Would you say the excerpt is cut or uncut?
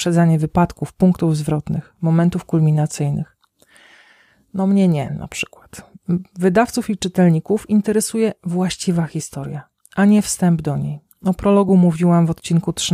uncut